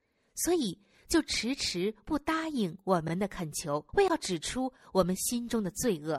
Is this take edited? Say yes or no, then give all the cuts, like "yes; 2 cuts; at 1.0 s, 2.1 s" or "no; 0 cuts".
yes; 1 cut; at 3.9 s